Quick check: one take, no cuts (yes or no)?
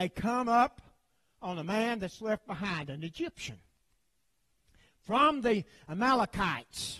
yes